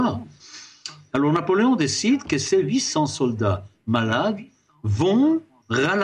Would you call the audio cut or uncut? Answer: uncut